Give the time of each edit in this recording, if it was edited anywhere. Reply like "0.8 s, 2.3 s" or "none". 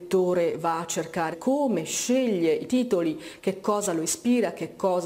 1.3 s, 2.7 s